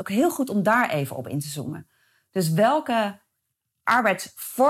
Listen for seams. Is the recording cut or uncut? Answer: uncut